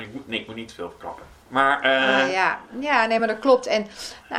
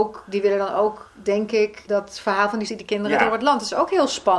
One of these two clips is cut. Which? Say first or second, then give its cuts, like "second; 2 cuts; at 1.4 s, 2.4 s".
second; 2 cuts; at 1.9 s, 2.7 s